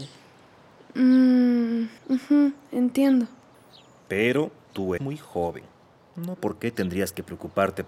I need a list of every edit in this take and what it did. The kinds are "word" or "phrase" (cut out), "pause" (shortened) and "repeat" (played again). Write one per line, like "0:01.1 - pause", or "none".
0:02.0 - pause
0:05.0 - word
0:06.4 - word